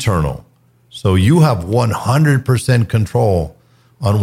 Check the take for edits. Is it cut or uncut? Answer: uncut